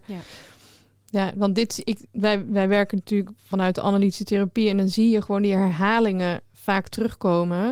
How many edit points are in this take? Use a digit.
0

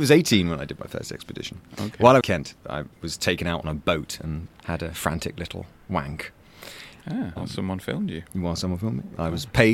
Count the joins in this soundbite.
2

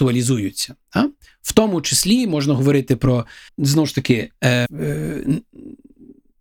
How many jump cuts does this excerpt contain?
2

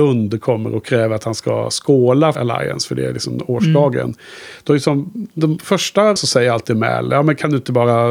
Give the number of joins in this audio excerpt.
2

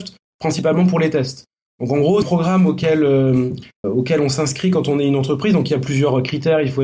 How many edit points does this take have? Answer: 2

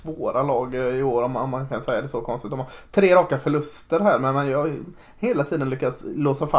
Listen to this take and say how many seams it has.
0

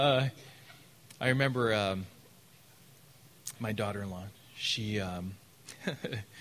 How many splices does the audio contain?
1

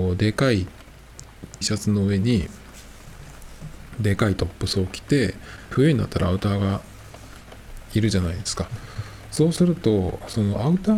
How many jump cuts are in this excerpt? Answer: 2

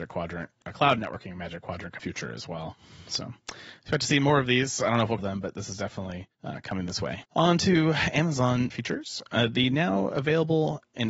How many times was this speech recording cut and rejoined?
4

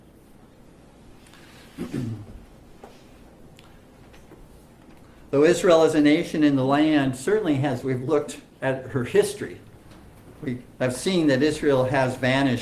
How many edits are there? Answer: 2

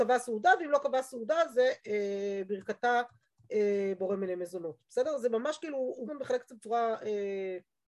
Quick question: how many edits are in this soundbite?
2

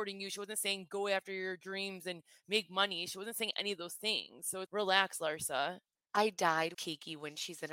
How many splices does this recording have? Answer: 2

